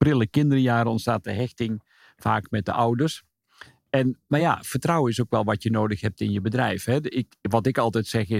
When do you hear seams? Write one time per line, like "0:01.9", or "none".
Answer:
none